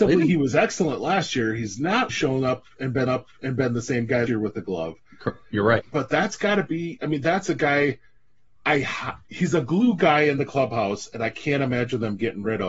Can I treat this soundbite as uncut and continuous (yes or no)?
no